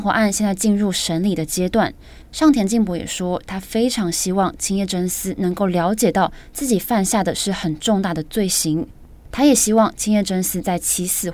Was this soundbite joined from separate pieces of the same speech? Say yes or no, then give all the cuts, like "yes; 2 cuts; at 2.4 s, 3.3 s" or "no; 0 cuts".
yes; 1 cut; at 9.2 s